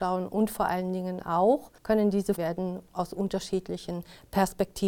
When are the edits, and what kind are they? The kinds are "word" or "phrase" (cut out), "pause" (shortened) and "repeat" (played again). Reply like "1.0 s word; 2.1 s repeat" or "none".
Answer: 1.8 s pause; 2.3 s phrase